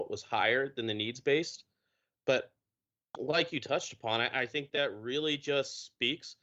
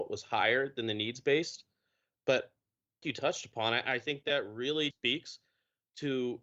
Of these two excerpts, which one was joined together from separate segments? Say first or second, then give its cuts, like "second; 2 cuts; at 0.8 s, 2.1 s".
second; 2 cuts; at 3.0 s, 4.9 s